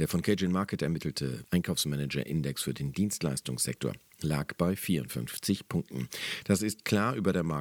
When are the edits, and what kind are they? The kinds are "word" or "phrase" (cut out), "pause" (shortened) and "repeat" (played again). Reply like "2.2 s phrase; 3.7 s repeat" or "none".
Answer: none